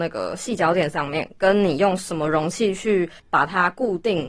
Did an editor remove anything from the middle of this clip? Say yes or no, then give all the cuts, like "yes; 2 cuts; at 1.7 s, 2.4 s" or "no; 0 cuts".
yes; 1 cut; at 3.2 s